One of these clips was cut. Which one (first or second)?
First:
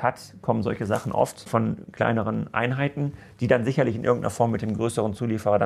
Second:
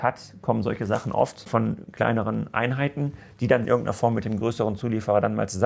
second